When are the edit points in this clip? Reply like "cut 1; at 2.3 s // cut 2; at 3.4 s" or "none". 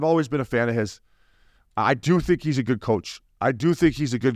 none